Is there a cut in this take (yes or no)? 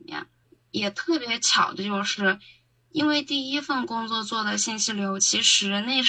no